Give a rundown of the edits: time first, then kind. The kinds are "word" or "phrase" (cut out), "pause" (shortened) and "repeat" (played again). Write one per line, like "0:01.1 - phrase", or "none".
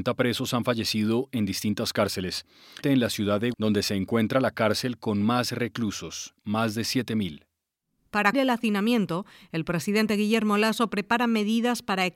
0:02.8 - word
0:03.5 - word
0:08.3 - word